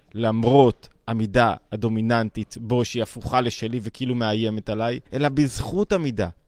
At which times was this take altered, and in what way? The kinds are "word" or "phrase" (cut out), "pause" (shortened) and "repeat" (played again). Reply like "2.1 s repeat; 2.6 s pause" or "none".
5.1 s pause